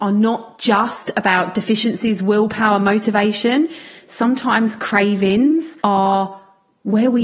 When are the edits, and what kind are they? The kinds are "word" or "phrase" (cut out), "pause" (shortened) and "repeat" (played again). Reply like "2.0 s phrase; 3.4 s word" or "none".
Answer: 5.8 s pause

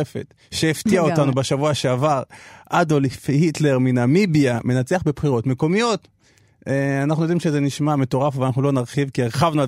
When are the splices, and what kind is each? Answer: none

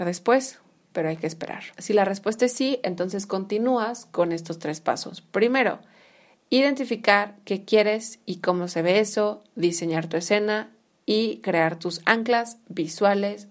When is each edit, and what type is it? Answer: 1.7 s pause

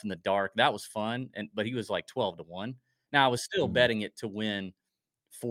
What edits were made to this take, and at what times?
none

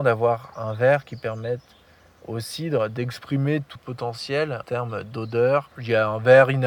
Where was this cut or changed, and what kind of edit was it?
3.8 s word; 4.6 s word; 5.7 s word

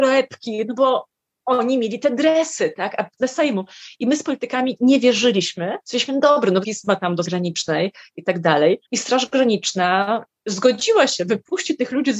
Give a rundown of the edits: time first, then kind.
1.2 s pause; 3.2 s word; 5.8 s pause; 6.6 s word; 7.3 s word; 8.8 s pause

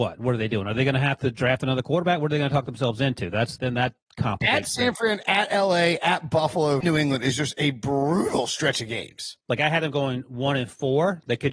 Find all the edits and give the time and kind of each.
3.6 s word; 6.8 s phrase; 9.4 s pause

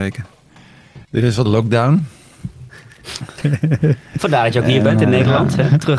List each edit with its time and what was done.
1.0 s pause; 1.5 s word

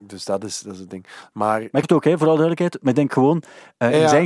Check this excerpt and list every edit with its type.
1.8 s phrase

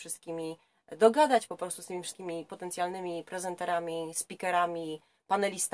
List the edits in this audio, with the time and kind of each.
none

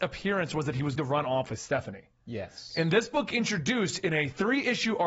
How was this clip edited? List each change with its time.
1.0 s word

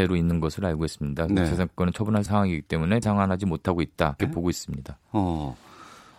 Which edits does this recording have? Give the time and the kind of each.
2.3 s phrase; 3.0 s word; 4.2 s word

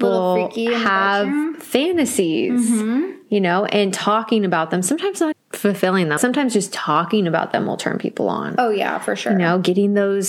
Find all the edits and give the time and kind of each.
5.3 s word; 6.2 s word

